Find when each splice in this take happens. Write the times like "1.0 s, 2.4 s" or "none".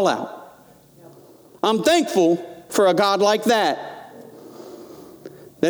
none